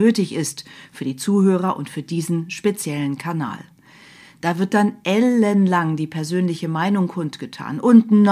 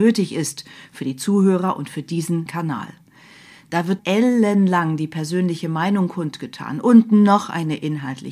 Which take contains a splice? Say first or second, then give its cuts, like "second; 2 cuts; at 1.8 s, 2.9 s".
second; 2 cuts; at 2.5 s, 4.0 s